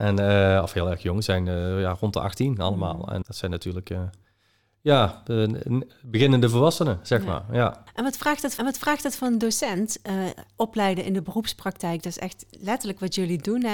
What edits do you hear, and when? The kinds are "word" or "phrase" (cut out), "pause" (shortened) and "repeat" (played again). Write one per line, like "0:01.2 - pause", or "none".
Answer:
0:03.2 - word
0:08.6 - repeat